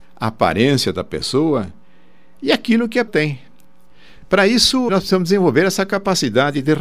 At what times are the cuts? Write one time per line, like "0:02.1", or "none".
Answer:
0:03.1
0:04.9